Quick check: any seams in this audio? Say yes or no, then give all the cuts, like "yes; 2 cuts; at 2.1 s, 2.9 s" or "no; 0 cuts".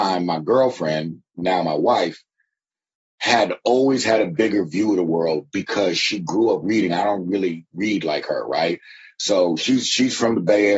no; 0 cuts